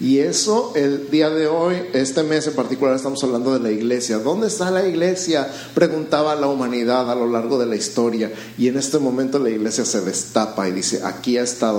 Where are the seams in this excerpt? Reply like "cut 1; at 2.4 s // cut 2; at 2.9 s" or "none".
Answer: none